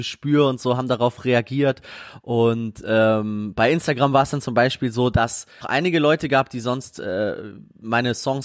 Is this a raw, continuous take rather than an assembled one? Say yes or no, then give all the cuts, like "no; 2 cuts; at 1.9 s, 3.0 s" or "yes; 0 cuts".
no; 1 cut; at 5.6 s